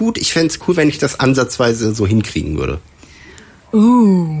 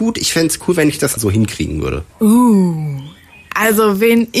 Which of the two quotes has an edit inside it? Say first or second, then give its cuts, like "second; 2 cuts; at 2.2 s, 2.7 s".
second; 2 cuts; at 1.2 s, 2.1 s